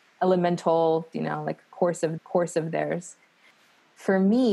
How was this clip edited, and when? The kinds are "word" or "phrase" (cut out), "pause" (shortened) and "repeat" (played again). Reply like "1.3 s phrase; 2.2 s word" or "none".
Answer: 1.1 s word; 2.2 s repeat